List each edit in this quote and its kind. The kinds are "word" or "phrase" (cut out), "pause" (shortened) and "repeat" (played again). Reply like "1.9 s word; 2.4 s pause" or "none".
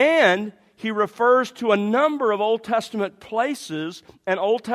none